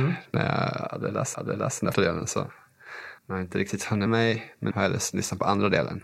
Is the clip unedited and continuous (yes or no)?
no